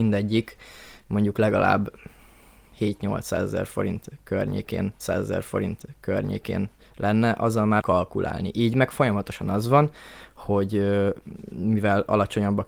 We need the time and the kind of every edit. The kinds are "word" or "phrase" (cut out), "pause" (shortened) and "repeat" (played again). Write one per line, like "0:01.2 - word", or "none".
0:05.0 - repeat
0:07.8 - word